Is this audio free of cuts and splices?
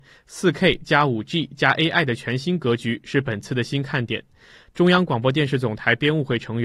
yes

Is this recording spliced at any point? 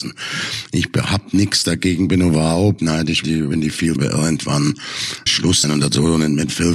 yes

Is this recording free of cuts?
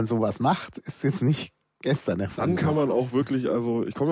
yes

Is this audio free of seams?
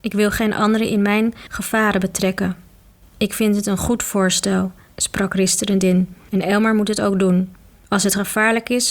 yes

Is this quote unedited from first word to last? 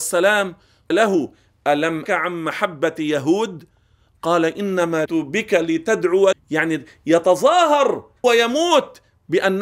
no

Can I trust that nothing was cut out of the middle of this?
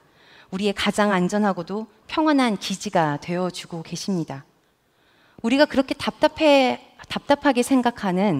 yes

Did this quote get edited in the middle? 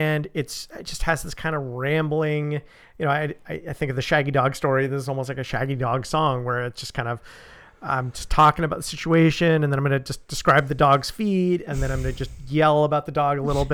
no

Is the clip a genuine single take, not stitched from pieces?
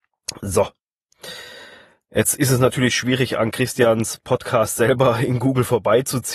yes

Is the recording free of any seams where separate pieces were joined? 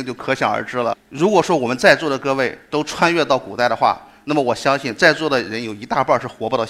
yes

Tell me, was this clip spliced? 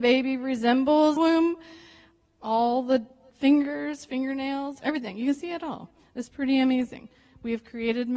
yes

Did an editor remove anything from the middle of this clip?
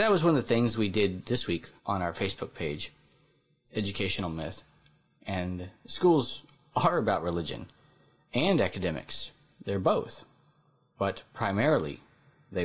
yes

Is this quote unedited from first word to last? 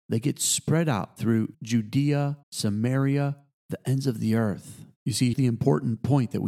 no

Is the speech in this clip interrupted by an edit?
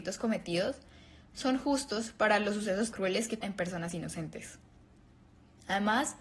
yes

